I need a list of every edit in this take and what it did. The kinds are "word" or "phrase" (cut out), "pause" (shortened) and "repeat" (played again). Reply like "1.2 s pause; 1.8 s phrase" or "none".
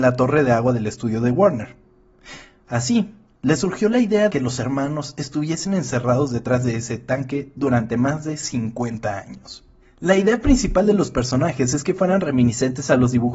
4.3 s word